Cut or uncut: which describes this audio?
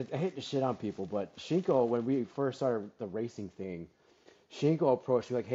uncut